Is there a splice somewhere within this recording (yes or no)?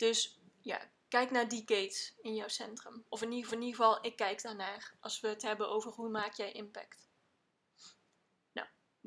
yes